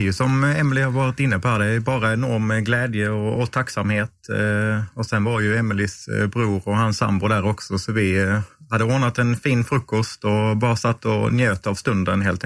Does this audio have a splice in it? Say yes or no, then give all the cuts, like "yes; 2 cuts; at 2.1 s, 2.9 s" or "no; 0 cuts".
no; 0 cuts